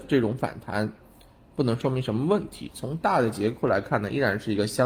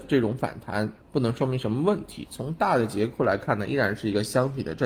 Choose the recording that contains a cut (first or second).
second